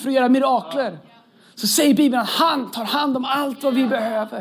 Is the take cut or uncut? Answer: uncut